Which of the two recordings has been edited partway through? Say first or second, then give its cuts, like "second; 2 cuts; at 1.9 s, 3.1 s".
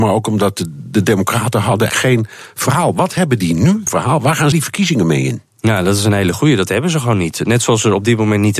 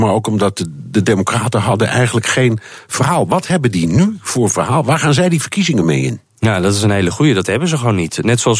first; 3 cuts; at 1.9 s, 3.9 s, 4.5 s